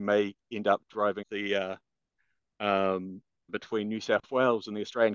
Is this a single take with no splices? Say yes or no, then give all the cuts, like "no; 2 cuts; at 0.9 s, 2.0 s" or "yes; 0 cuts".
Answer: no; 2 cuts; at 1.2 s, 3.5 s